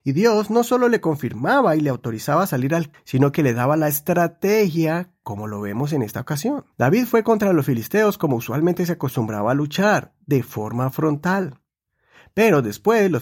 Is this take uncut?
no; 2 cuts; at 2.9 s, 6.7 s

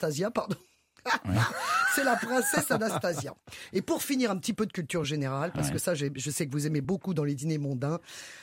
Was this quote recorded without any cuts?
yes; 0 cuts

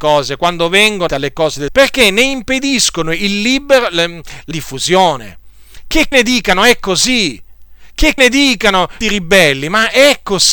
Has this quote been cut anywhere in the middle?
yes; 6 cuts; at 1.1 s, 1.7 s, 4.5 s, 6.1 s, 8.2 s, 9.0 s

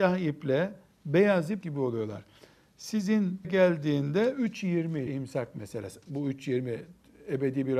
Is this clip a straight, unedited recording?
no; 3 cuts; at 1.6 s, 3.4 s, 5.1 s

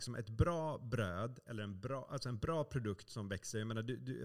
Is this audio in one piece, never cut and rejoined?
yes; 0 cuts

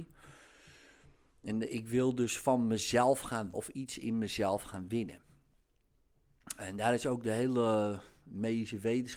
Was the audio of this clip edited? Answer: yes; 1 cut; at 3.5 s

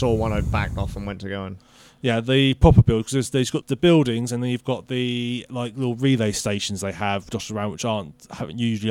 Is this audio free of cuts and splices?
no; 1 cut; at 3.6 s

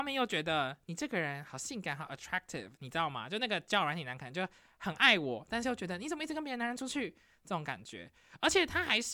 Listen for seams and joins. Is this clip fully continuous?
yes; 0 cuts

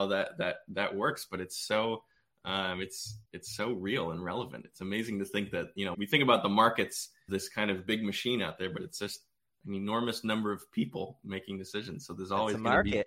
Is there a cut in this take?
yes; 3 cuts; at 3.3 s, 5.9 s, 7.3 s

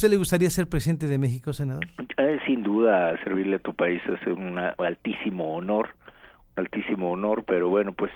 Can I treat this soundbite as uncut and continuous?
yes; 0 cuts

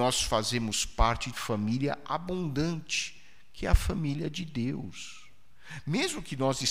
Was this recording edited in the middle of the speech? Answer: yes; 1 cut; at 1.3 s

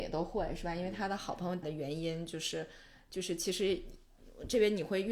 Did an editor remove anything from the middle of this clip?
yes; 1 cut; at 1.6 s

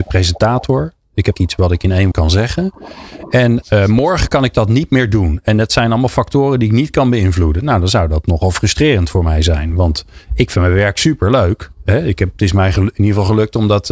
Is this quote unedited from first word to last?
no; 3 cuts; at 1.3 s, 2.1 s, 3.6 s

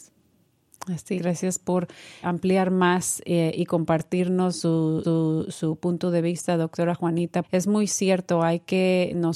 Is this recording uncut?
no; 4 cuts; at 1.2 s, 2.2 s, 5.0 s, 7.4 s

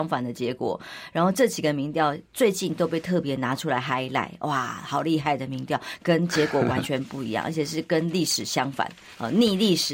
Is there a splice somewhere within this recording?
yes; 1 cut; at 2.3 s

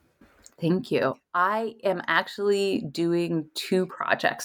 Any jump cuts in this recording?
no; 0 cuts

